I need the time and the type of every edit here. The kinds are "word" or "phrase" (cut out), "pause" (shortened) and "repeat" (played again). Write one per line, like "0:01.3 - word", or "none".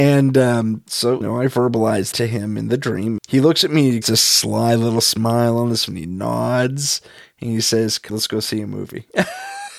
0:01.2 - word
0:02.1 - word
0:03.2 - word
0:04.0 - word
0:05.9 - word
0:08.1 - word